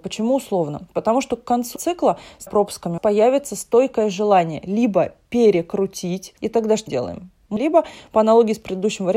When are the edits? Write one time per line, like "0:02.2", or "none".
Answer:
0:01.8
0:02.5
0:03.0
0:06.4
0:06.9
0:07.6